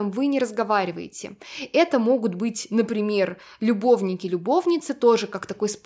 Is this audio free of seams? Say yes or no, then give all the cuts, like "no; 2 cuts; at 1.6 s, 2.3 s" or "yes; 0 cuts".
yes; 0 cuts